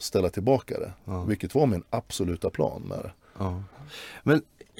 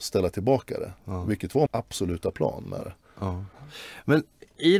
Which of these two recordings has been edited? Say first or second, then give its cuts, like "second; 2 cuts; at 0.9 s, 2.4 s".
second; 1 cut; at 1.7 s